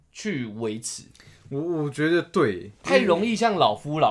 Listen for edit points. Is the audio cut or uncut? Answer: uncut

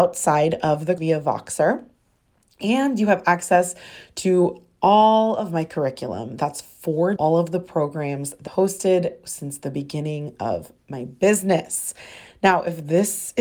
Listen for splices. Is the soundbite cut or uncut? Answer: cut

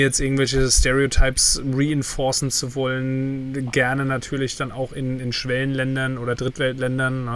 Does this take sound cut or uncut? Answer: uncut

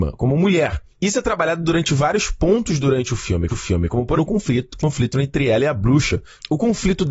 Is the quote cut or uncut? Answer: cut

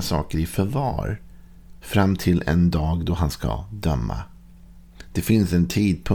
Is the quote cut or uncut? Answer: uncut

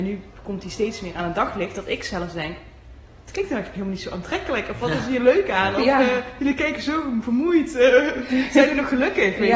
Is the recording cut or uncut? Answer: uncut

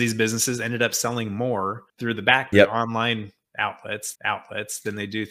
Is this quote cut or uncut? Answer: cut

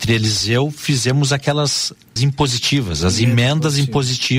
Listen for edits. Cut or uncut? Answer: cut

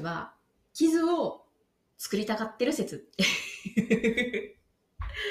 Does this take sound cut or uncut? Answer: uncut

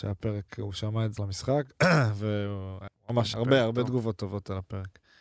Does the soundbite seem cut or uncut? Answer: cut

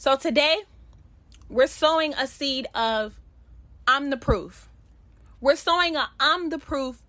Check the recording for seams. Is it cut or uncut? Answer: uncut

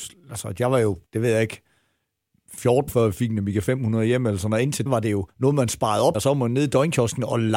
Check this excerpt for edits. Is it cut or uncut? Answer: cut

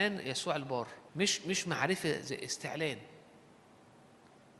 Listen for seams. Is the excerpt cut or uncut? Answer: cut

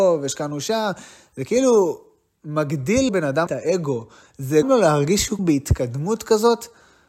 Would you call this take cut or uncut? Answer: cut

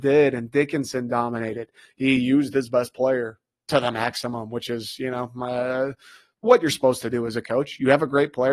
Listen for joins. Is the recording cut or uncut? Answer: uncut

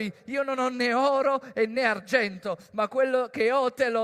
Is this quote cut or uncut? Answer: uncut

